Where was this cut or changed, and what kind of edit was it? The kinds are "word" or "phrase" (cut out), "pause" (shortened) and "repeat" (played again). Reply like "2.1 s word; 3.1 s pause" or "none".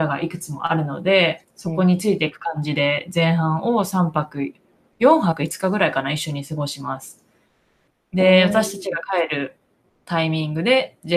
1.5 s pause